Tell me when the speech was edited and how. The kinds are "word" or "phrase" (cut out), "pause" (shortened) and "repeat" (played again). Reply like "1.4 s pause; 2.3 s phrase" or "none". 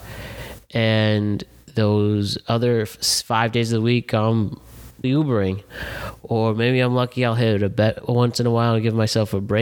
5.0 s word